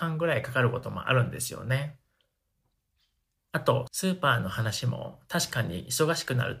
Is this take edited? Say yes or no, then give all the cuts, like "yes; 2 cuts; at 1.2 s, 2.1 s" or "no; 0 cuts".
no; 0 cuts